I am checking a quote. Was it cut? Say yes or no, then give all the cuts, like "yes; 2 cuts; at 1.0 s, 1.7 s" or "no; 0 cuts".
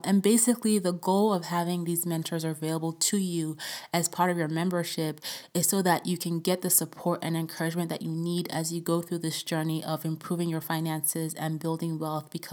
no; 0 cuts